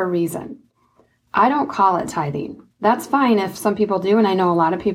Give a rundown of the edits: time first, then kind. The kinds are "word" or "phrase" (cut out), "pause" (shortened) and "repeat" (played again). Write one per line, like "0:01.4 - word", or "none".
0:02.7 - pause